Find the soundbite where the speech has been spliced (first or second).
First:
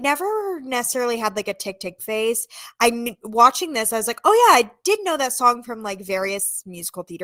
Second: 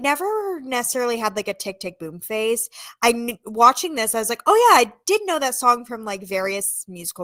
first